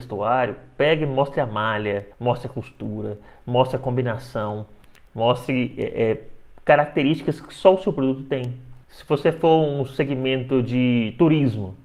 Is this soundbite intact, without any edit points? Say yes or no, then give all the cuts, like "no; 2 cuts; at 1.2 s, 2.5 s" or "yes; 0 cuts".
no; 2 cuts; at 2.1 s, 8.8 s